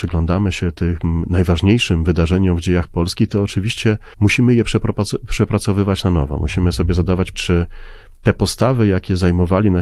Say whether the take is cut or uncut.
cut